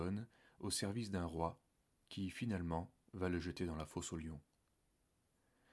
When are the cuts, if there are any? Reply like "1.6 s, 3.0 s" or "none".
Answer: none